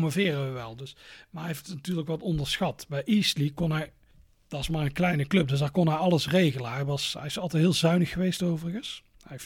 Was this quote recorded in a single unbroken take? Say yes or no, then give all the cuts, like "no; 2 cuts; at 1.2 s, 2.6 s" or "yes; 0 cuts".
yes; 0 cuts